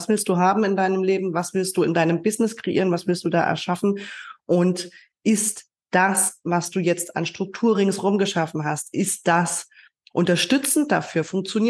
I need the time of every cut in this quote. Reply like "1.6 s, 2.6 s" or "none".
none